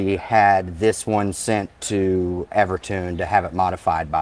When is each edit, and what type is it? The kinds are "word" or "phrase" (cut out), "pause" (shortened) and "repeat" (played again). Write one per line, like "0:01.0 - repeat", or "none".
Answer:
0:02.5 - word